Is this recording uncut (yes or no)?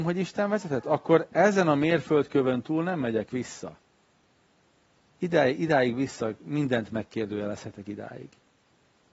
yes